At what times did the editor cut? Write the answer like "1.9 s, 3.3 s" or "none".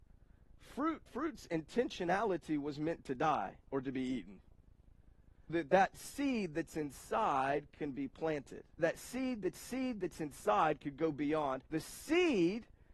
1.1 s, 3.6 s, 5.5 s, 8.8 s, 9.5 s, 11.7 s